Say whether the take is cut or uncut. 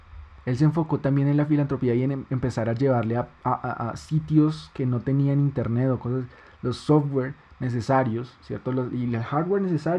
uncut